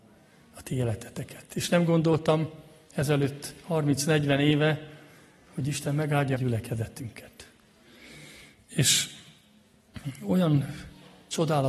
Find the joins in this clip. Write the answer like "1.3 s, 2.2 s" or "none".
6.4 s